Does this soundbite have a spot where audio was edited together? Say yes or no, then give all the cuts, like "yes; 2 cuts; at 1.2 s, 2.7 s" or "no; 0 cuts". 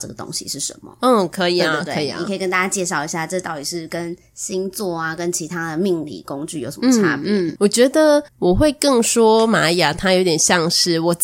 yes; 2 cuts; at 7.6 s, 8.3 s